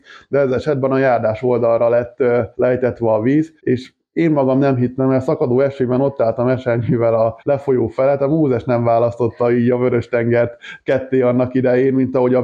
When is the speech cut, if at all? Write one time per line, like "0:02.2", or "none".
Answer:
0:02.5
0:03.6
0:07.4